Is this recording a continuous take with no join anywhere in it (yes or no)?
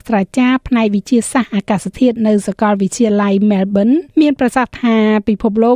no